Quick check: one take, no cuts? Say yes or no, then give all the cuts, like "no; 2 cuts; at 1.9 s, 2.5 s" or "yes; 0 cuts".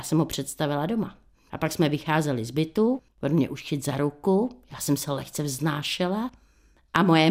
no; 1 cut; at 3.1 s